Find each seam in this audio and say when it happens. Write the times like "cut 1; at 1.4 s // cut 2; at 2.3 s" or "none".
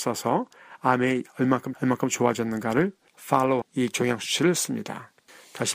cut 1; at 1.7 s // cut 2; at 3.6 s